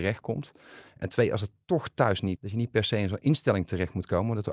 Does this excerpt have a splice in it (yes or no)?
yes